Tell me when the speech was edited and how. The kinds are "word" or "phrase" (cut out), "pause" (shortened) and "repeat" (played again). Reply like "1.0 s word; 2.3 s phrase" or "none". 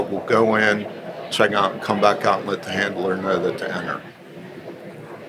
1.5 s word; 3.6 s phrase